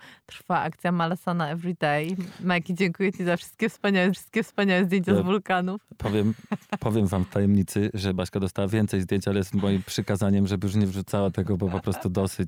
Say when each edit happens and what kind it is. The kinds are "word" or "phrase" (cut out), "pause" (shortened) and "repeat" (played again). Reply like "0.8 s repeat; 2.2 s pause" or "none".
4.1 s repeat